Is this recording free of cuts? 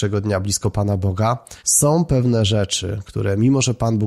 no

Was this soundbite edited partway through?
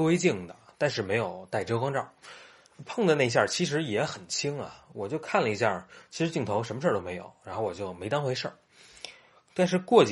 no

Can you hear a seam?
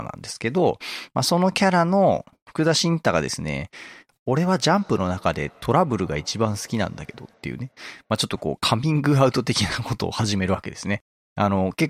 no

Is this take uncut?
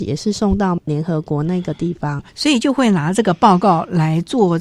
no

